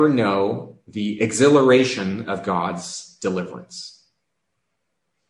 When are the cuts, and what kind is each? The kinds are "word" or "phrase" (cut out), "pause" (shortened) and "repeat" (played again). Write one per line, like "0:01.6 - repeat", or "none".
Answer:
none